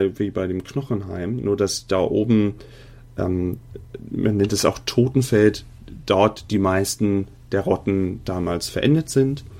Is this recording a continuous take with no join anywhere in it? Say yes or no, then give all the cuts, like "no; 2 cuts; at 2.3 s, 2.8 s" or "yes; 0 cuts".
yes; 0 cuts